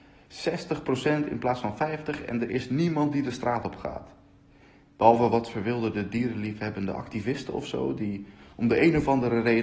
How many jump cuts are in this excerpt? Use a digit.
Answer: 0